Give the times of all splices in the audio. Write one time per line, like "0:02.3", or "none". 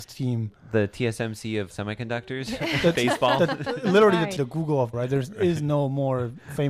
0:01.7
0:02.9
0:04.4
0:04.9